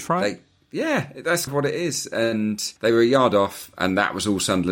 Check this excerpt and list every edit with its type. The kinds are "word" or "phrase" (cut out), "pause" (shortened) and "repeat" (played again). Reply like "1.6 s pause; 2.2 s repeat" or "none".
1.5 s word; 2.8 s pause